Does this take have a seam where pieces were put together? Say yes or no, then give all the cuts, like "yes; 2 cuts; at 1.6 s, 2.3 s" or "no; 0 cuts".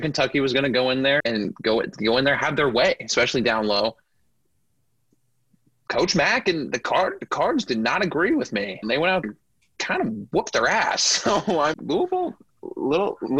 yes; 4 cuts; at 1.2 s, 8.8 s, 9.2 s, 11.7 s